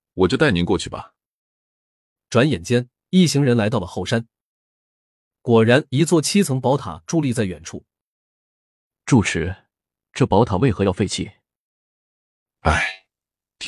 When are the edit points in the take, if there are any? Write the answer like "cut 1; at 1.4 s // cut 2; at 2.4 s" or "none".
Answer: none